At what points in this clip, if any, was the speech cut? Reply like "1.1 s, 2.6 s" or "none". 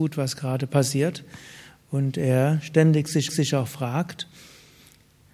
3.3 s